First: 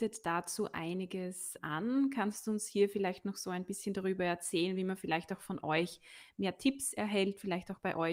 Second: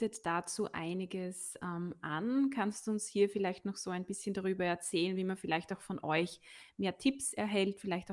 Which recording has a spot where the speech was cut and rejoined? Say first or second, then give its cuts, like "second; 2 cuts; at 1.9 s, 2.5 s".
first; 1 cut; at 1.6 s